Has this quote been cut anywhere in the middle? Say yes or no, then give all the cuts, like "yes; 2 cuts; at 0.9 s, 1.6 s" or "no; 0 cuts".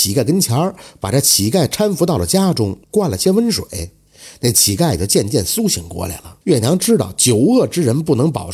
yes; 2 cuts; at 2.8 s, 6.4 s